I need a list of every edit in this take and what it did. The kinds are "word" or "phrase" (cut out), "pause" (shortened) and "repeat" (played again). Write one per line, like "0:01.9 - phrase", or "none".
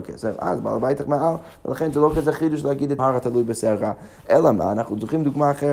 0:03.0 - phrase